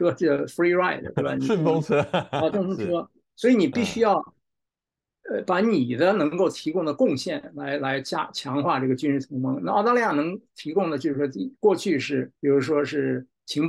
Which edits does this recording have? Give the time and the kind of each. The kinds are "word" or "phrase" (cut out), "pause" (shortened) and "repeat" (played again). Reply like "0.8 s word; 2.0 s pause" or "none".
2.5 s word; 12.4 s pause